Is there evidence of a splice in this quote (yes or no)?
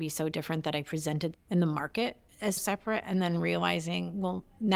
yes